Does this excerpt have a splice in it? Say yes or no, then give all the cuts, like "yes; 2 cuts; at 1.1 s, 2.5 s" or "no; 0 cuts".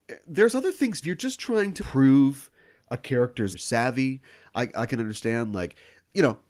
yes; 3 cuts; at 1.0 s, 1.8 s, 3.5 s